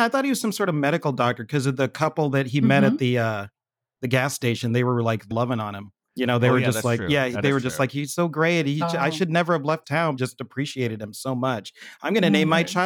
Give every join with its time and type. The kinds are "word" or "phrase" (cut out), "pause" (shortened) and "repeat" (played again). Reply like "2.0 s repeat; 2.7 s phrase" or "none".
5.3 s word; 6.0 s pause; 9.8 s word; 10.2 s phrase